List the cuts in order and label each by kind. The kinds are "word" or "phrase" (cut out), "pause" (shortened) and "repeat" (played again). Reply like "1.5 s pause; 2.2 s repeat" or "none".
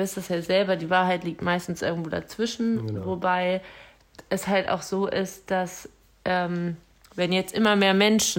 none